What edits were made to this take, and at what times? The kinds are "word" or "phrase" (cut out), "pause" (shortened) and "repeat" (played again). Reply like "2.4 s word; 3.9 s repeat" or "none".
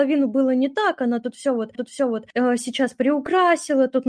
1.7 s repeat